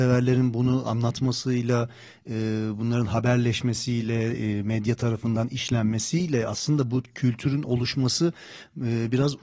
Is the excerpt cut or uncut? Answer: uncut